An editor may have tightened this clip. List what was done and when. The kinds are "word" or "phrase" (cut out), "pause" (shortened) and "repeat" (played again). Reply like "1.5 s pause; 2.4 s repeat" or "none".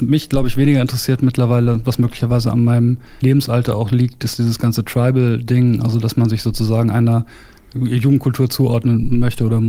none